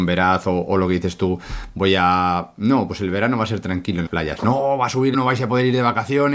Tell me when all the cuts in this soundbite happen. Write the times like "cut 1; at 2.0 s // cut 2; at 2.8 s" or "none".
cut 1; at 4.1 s // cut 2; at 5.1 s